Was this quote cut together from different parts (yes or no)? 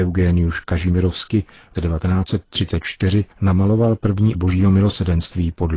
yes